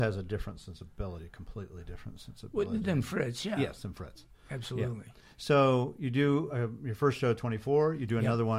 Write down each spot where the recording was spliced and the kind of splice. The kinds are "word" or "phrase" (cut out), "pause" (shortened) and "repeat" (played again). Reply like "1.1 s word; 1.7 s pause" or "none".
none